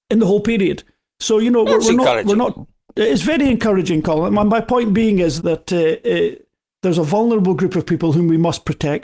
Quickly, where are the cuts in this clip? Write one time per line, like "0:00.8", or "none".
0:05.4